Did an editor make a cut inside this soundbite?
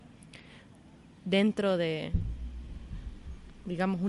no; 0 cuts

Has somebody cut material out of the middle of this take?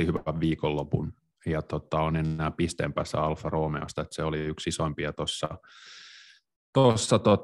no; 0 cuts

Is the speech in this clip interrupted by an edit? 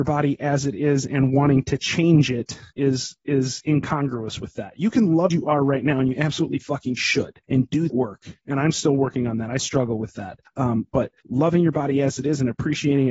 yes; 5 cuts; at 2.7 s, 5.3 s, 7.4 s, 7.9 s, 9.6 s

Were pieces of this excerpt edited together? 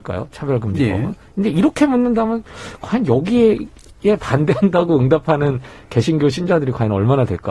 no; 0 cuts

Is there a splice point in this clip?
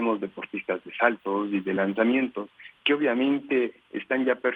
no; 0 cuts

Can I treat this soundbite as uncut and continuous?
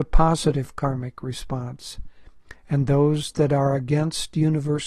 yes; 0 cuts

